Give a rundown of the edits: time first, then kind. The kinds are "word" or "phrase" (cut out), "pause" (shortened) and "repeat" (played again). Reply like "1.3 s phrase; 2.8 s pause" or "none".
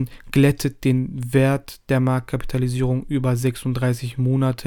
none

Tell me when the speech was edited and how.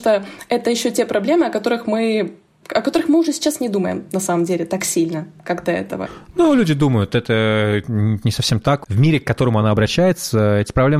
none

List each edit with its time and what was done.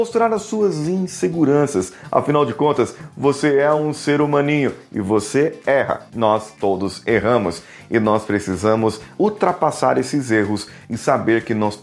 none

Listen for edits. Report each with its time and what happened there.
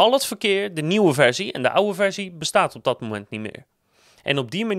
none

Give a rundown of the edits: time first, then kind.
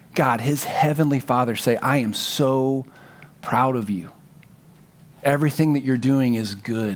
none

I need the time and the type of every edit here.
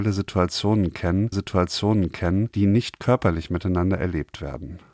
1.3 s repeat

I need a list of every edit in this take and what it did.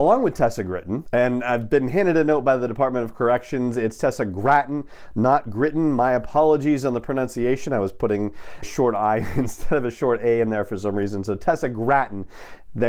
8.6 s word

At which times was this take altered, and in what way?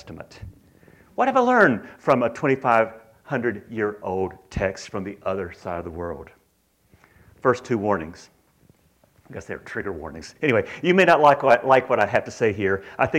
none

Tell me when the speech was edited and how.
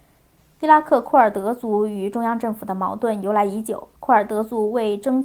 4.0 s pause

